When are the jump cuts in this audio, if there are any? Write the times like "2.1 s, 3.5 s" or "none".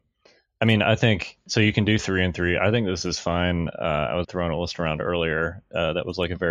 4.2 s